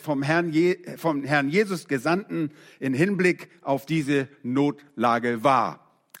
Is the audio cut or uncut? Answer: uncut